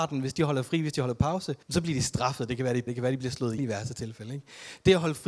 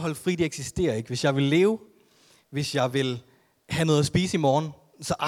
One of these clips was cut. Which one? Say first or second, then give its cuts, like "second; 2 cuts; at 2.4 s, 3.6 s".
first; 3 cuts; at 1.6 s, 2.9 s, 3.6 s